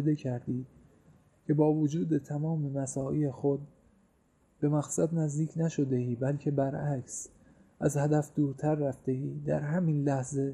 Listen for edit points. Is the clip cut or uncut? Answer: uncut